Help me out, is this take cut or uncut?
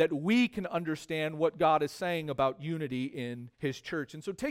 cut